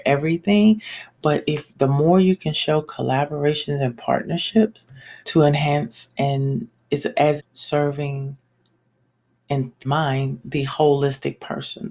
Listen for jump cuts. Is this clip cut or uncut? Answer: cut